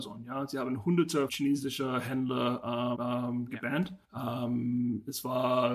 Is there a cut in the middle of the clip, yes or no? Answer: yes